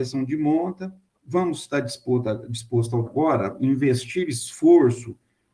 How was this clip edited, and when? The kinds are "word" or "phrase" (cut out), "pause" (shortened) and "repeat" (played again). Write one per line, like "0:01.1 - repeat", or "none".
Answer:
0:01.1 - pause
0:03.1 - word